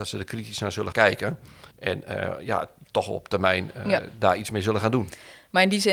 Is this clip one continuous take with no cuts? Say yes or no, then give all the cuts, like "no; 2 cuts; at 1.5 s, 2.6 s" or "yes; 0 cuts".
no; 2 cuts; at 0.9 s, 1.7 s